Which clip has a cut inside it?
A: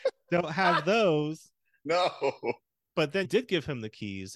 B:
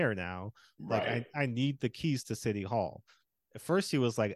A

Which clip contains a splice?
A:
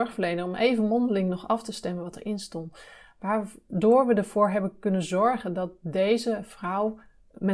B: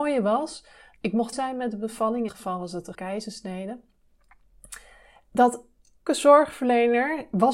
B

